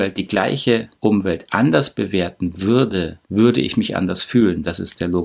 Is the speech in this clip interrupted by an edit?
yes; 2 cuts; at 1.0 s, 3.2 s

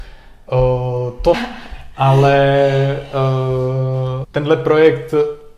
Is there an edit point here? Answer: yes; 2 cuts; at 1.3 s, 4.2 s

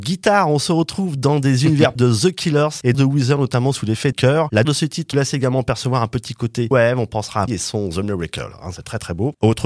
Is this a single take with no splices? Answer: no; 7 cuts; at 2.0 s, 2.9 s, 4.1 s, 4.6 s, 5.1 s, 6.7 s, 7.5 s

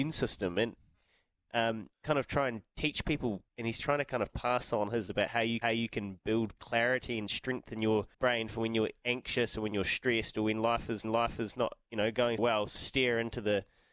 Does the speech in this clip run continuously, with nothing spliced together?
no; 8 cuts; at 1.9 s, 3.5 s, 5.1 s, 5.6 s, 8.1 s, 11.0 s, 12.4 s, 12.8 s

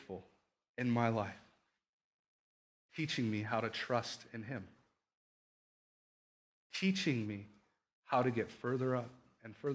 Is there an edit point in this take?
no; 0 cuts

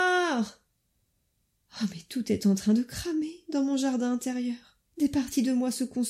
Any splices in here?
yes; 1 cut; at 4.9 s

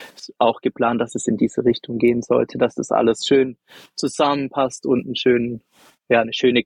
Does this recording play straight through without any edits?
yes; 0 cuts

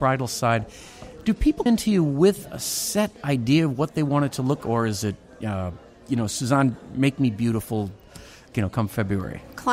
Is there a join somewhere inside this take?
yes; 3 cuts; at 1.7 s, 4.6 s, 8.5 s

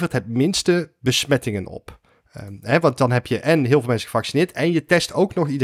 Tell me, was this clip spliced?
no; 0 cuts

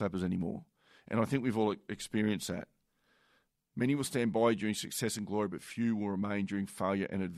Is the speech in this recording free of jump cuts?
yes; 0 cuts

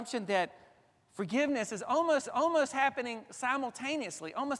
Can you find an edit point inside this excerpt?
yes; 1 cut; at 2.3 s

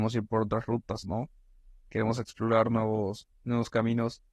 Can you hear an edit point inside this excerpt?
no; 0 cuts

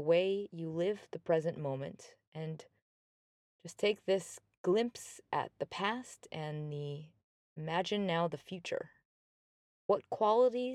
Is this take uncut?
yes; 0 cuts

